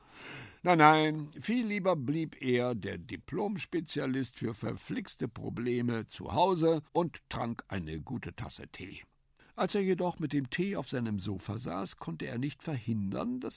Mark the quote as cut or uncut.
cut